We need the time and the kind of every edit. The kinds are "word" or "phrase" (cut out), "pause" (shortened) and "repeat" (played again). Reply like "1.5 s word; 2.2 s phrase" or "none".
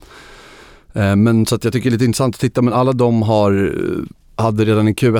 none